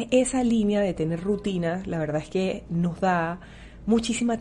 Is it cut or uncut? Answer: uncut